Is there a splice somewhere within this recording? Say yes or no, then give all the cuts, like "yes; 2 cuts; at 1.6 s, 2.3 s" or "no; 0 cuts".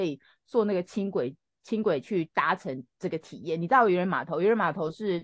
no; 0 cuts